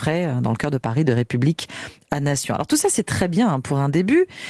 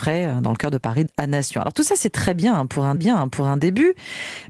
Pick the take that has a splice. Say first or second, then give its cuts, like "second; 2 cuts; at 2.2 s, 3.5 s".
second; 2 cuts; at 1.1 s, 3.0 s